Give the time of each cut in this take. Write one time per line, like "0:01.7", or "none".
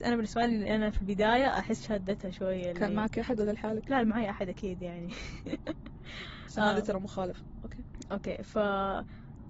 none